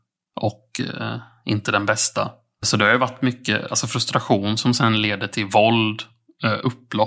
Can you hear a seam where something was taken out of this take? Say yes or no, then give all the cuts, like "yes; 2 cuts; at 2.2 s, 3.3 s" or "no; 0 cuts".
no; 0 cuts